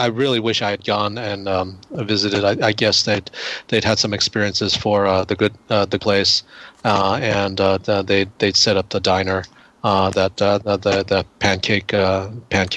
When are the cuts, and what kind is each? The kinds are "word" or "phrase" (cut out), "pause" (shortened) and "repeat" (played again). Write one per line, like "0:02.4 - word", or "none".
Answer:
0:06.0 - word

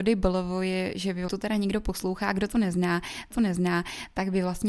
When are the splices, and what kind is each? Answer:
0:01.3 - phrase
0:03.3 - repeat

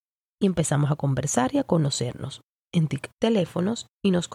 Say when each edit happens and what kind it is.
0:03.1 - word

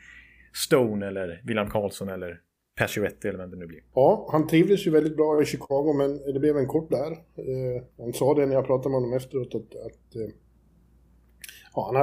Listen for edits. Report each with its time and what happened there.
0:02.5 - pause
0:06.9 - word
0:07.9 - pause

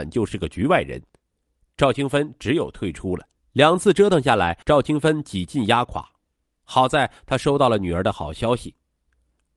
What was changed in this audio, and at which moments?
0:03.4 - pause
0:04.6 - pause

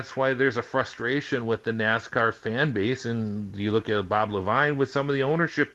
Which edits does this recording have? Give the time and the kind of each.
none

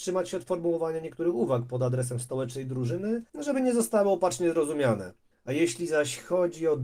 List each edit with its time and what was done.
0:03.3 - pause
0:05.3 - pause

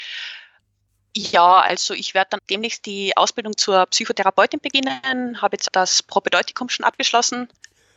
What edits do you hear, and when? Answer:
0:02.4 - word
0:05.7 - word

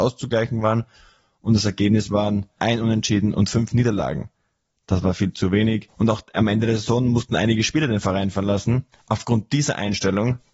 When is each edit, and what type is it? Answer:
none

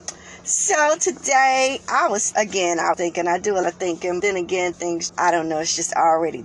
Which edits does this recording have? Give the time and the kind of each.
0:02.3 - word
0:02.9 - word
0:03.6 - word
0:04.2 - word
0:04.7 - word
0:05.1 - word

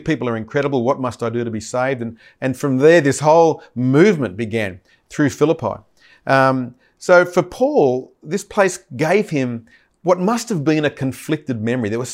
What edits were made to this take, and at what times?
none

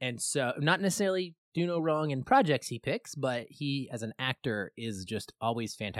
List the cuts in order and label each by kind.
none

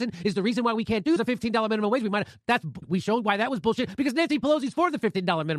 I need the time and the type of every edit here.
0:01.2 - phrase
0:02.8 - word

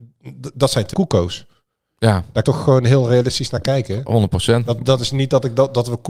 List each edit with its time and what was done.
0:00.9 - word
0:02.4 - word

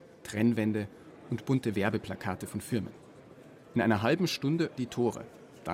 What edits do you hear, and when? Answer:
0:04.8 - word

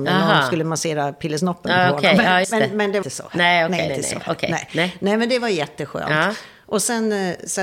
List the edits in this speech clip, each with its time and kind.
0:02.4 - word
0:03.0 - word
0:03.9 - word

